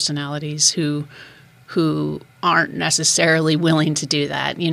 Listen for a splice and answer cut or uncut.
cut